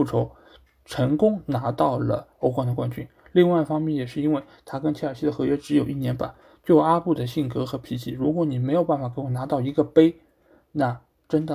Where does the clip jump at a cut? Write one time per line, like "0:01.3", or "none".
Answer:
0:02.3